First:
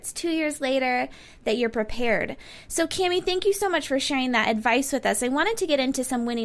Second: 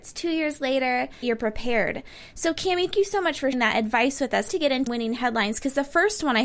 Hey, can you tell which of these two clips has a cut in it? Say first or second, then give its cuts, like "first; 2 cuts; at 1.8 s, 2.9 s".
second; 5 cuts; at 1.2 s, 2.9 s, 3.5 s, 4.5 s, 4.9 s